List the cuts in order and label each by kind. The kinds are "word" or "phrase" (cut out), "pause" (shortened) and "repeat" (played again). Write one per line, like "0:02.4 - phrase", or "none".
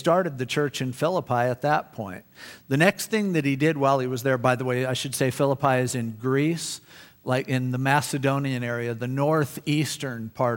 none